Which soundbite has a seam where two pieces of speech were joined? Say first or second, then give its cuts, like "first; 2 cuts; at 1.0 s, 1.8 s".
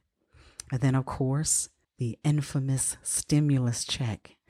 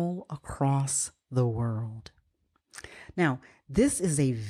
first; 1 cut; at 1.8 s